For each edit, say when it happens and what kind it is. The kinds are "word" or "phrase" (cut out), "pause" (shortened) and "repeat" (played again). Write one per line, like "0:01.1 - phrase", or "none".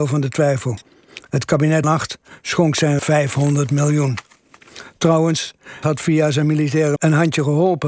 0:01.8 - word
0:03.0 - word
0:05.8 - word
0:07.0 - word